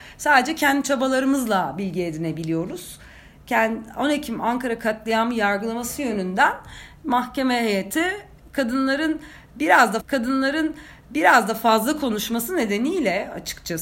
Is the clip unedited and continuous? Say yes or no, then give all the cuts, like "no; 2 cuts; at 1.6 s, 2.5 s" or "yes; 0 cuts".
no; 1 cut; at 10.0 s